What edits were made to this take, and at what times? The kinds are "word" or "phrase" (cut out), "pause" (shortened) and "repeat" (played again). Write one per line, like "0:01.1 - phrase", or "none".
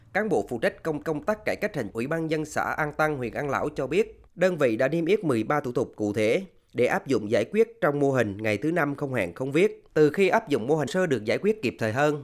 0:01.0 - repeat
0:01.9 - word
0:04.3 - pause
0:09.9 - pause
0:10.9 - phrase

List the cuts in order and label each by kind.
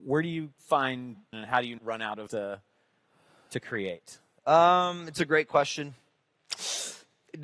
0:01.3 - word
0:01.8 - word
0:02.3 - word

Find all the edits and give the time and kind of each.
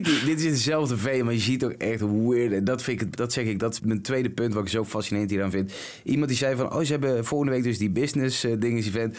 0:03.2 - word
0:03.8 - word

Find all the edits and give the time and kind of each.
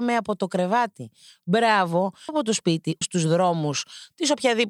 0:02.3 - word
0:03.0 - word

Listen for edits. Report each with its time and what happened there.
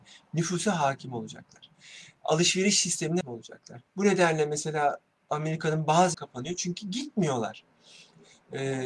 0:03.2 - word
0:03.9 - pause
0:05.1 - pause
0:06.1 - phrase

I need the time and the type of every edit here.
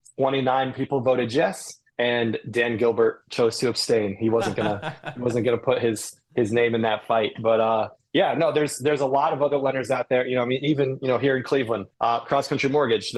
0:01.9 - pause
0:11.9 - pause

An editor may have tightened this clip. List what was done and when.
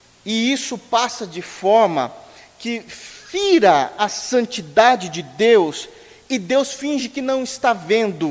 none

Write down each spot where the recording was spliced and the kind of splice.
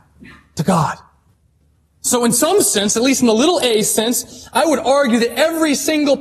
0:01.3 - pause

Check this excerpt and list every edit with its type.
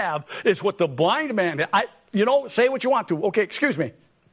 none

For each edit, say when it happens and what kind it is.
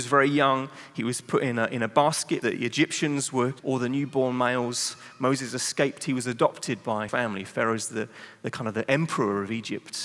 0:02.4 - word
0:03.6 - word
0:07.1 - word

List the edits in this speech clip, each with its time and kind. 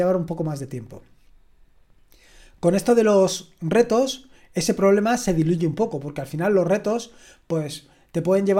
none

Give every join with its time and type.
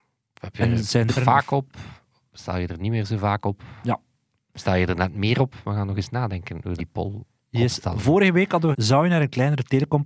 0:01.2 - word
0:06.8 - word
0:08.7 - word

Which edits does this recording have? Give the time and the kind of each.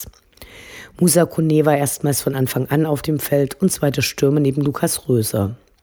none

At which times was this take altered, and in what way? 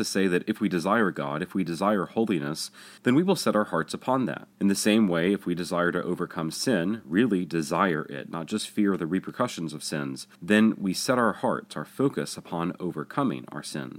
0:03.0 - pause
0:04.5 - pause
0:10.4 - pause

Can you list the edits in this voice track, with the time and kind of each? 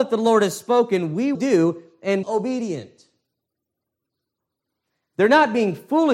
0:01.3 - word
0:02.2 - phrase

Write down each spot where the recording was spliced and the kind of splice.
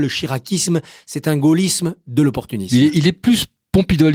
none

